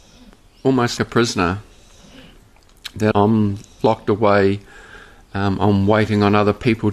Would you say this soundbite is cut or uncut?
cut